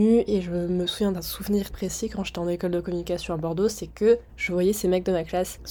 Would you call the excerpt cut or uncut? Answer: cut